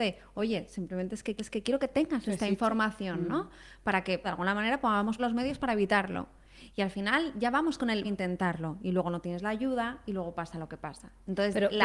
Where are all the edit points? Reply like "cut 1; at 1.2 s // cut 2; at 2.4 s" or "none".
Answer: cut 1; at 1.4 s // cut 2; at 4.2 s // cut 3; at 5.2 s // cut 4; at 8.0 s